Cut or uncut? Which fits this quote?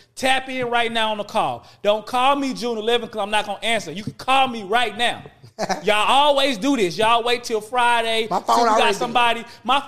uncut